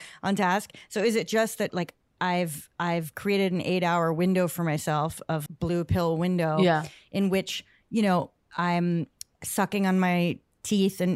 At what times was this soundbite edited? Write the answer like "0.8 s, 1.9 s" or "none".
1.7 s, 5.5 s